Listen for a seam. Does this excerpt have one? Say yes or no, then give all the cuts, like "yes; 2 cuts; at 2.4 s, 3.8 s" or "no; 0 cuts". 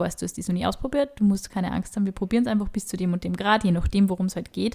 no; 0 cuts